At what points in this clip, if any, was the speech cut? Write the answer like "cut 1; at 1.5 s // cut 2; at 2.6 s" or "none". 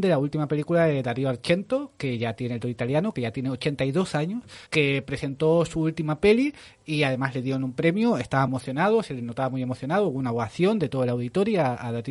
cut 1; at 2.6 s // cut 2; at 4.7 s // cut 3; at 8.5 s